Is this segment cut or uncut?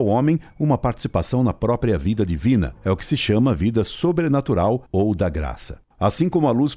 uncut